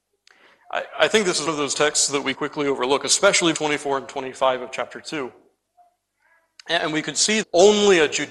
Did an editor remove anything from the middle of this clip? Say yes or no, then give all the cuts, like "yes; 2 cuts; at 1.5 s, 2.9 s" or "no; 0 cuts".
yes; 4 cuts; at 1.5 s, 2.3 s, 3.5 s, 7.4 s